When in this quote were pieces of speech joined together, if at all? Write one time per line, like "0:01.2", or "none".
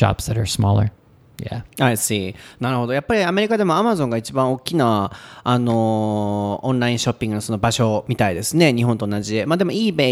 none